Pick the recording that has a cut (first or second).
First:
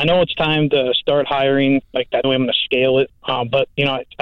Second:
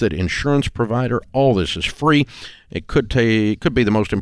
first